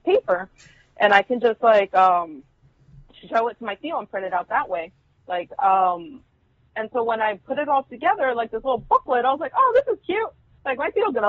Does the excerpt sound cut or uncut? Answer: uncut